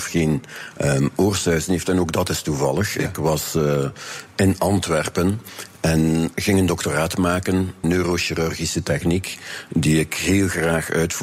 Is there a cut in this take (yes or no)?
yes